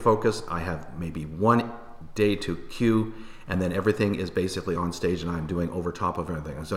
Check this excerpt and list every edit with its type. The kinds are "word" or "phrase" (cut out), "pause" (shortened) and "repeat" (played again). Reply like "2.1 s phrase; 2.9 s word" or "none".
none